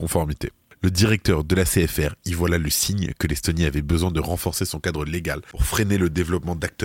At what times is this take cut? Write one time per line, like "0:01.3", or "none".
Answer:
none